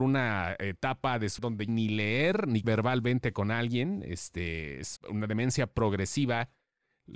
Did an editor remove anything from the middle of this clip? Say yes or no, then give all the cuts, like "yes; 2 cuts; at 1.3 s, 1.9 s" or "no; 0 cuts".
yes; 4 cuts; at 1.4 s, 1.7 s, 2.6 s, 5.0 s